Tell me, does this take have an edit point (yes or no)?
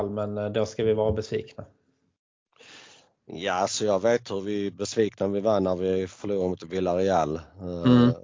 no